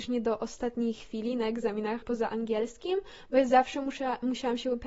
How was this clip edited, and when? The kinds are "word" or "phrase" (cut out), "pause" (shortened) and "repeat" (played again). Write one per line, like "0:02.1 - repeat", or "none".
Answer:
0:02.0 - word